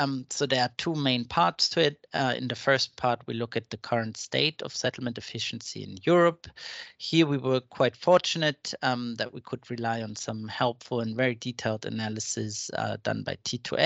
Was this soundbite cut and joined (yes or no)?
no